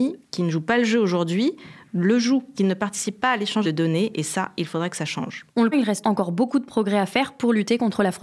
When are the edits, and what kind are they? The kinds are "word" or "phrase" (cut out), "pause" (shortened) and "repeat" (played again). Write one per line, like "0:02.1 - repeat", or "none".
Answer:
0:02.5 - word
0:03.6 - word
0:05.7 - word
0:06.0 - word